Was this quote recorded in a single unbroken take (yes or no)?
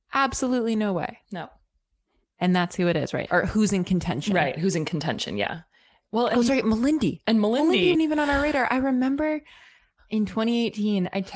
no